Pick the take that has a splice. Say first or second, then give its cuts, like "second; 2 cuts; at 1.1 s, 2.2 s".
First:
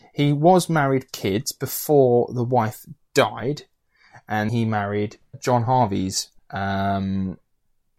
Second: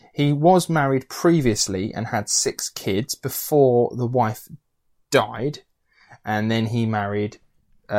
first; 5 cuts; at 1.1 s, 3.0 s, 4.5 s, 5.3 s, 6.4 s